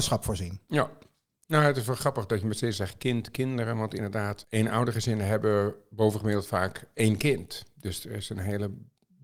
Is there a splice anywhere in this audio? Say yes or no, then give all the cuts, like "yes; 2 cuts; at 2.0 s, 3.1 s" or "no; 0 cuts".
no; 0 cuts